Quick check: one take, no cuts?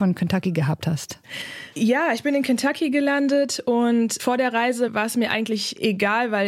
yes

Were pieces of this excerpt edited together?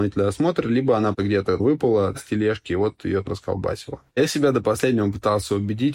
no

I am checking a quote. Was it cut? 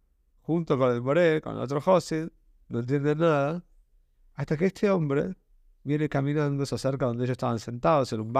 no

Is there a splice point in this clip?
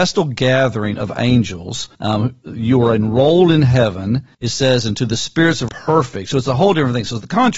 yes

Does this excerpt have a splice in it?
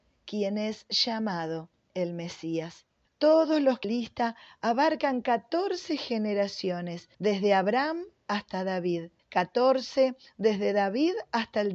yes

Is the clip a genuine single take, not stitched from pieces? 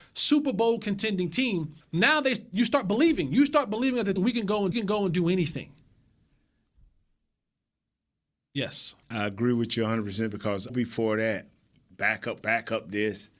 no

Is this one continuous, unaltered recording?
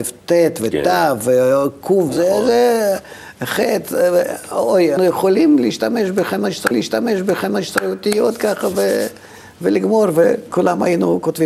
no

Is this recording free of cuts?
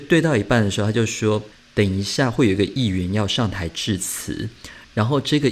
no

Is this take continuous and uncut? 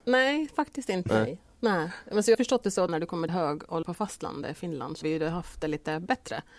no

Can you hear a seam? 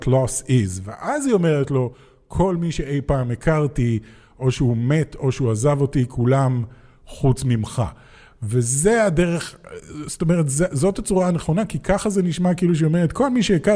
no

